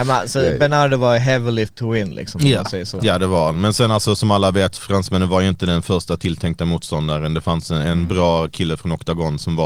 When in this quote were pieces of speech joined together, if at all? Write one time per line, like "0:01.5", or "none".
0:01.7